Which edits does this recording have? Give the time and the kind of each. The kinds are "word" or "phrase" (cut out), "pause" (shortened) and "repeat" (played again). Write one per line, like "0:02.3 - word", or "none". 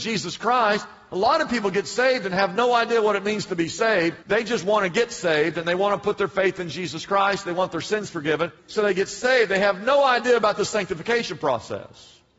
0:04.2 - pause
0:08.6 - pause